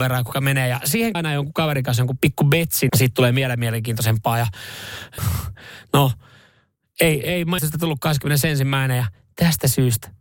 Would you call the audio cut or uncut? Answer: cut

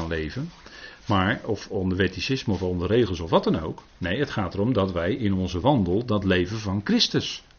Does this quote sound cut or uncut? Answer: uncut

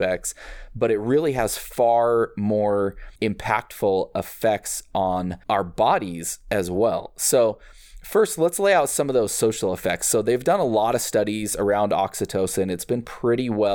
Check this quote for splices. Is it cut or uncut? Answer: cut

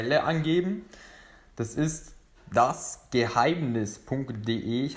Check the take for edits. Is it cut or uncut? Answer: cut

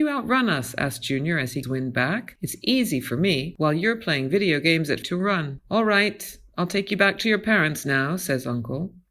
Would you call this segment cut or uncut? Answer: cut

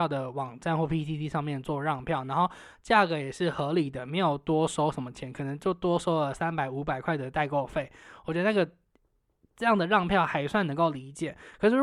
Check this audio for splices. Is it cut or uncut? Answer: uncut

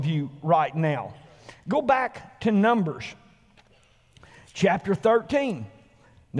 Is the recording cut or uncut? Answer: uncut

